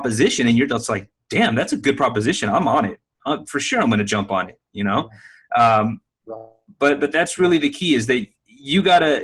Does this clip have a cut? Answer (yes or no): no